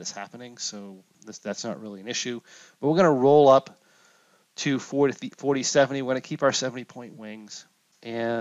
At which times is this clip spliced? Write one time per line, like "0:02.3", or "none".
0:01.1

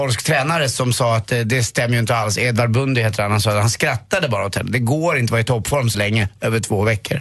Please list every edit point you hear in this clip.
0:05.9

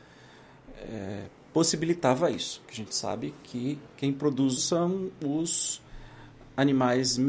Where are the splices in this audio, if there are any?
0:03.9
0:04.6

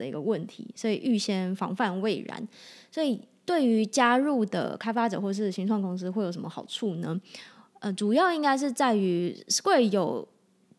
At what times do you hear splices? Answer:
none

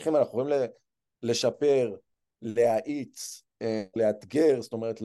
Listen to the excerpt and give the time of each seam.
0:04.0

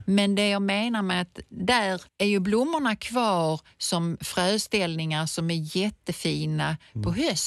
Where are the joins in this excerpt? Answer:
0:02.1

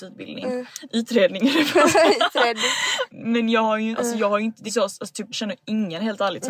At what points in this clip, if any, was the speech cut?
0:03.1
0:03.9
0:04.7
0:05.3

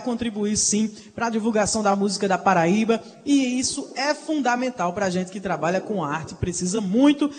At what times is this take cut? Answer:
none

